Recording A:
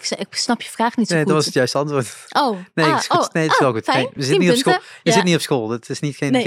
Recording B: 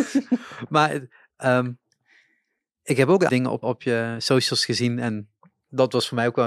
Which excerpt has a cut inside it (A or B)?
B